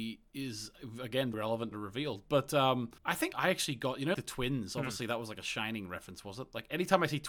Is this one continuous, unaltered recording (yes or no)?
no